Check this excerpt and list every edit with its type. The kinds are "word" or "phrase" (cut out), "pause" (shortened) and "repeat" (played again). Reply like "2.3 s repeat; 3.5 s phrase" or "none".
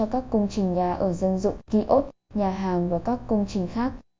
1.6 s pause